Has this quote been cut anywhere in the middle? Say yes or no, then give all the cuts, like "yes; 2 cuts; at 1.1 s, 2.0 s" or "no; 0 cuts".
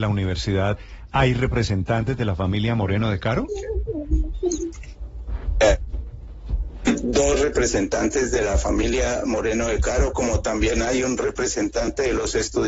no; 0 cuts